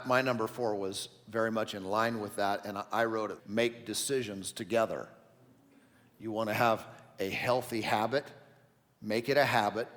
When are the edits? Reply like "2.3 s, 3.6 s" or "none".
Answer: 3.4 s